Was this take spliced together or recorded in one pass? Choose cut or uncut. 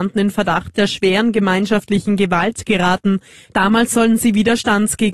uncut